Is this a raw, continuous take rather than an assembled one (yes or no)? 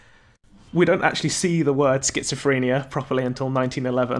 yes